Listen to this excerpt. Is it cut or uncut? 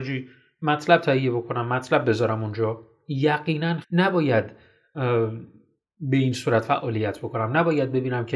cut